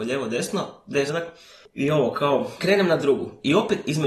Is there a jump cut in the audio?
yes; 2 cuts; at 1.1 s, 2.6 s

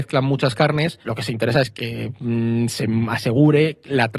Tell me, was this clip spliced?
yes; 2 cuts; at 1.0 s, 1.8 s

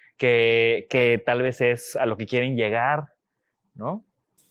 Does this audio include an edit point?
no; 0 cuts

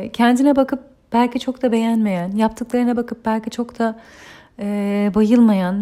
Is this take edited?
no; 0 cuts

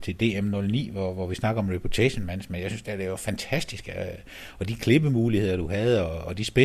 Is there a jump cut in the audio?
no; 0 cuts

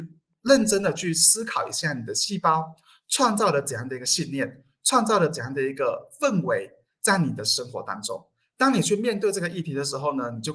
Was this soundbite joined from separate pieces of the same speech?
no; 0 cuts

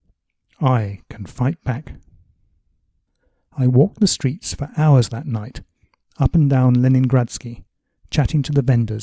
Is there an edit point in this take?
no; 0 cuts

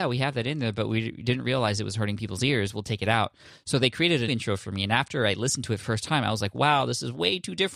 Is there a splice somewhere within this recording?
yes; 2 cuts; at 4.3 s, 5.8 s

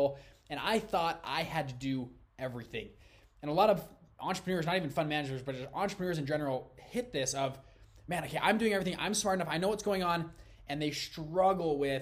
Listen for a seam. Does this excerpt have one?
no; 0 cuts

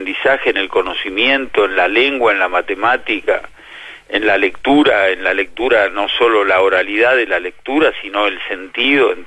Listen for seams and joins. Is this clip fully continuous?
yes; 0 cuts

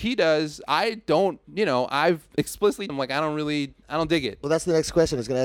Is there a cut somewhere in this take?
yes; 3 cuts; at 1.4 s, 2.9 s, 3.8 s

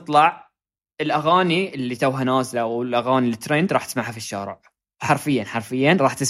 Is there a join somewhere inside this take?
no; 0 cuts

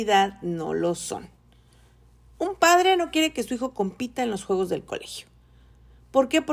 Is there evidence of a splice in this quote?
no; 0 cuts

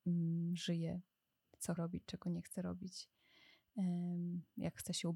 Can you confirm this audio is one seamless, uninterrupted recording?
no; 1 cut; at 1.8 s

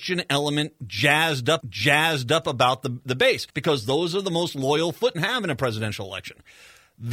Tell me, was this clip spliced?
yes; 3 cuts; at 1.6 s, 3.5 s, 5.1 s

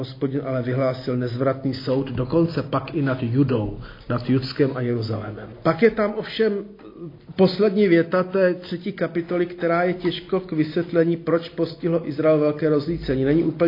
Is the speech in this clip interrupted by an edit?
no; 0 cuts

